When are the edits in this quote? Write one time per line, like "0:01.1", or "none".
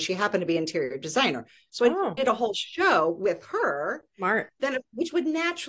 none